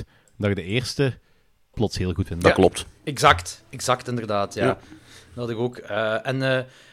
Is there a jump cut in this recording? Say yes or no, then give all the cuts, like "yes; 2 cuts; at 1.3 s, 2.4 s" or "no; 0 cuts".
yes; 2 cuts; at 1.7 s, 2.3 s